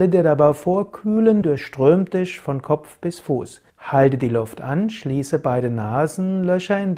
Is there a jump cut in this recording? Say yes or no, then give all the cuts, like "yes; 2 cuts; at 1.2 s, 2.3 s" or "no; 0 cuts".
yes; 2 cuts; at 1.4 s, 3.7 s